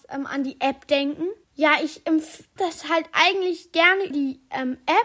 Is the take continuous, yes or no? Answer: no